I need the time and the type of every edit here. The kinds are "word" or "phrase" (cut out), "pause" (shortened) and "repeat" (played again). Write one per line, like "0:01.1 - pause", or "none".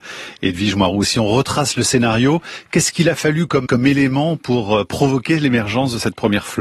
0:03.7 - word